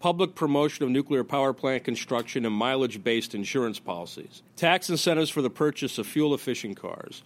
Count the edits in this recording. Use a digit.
1